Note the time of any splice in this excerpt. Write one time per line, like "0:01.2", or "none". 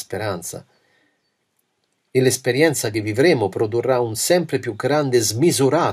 none